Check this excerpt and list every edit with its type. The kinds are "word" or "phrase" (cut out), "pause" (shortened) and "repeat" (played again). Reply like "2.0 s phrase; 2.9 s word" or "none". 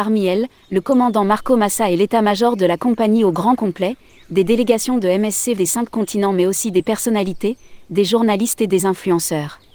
5.6 s word